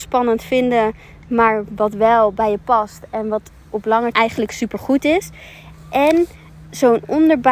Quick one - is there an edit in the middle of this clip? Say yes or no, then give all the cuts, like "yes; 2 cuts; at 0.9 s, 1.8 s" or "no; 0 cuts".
yes; 1 cut; at 4.1 s